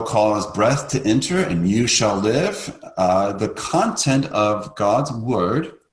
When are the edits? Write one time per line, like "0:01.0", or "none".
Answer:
none